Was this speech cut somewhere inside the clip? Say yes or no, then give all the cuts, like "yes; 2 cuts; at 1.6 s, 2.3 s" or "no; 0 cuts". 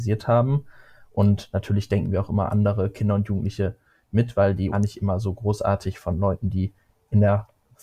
yes; 1 cut; at 4.7 s